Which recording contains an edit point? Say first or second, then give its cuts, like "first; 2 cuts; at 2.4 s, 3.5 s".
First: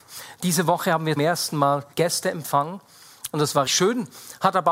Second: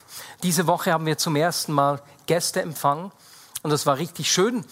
first; 3 cuts; at 1.2 s, 1.9 s, 3.7 s